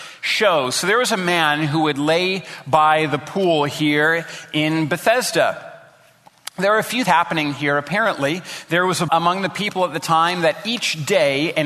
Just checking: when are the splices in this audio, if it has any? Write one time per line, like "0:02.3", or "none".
0:07.1
0:09.1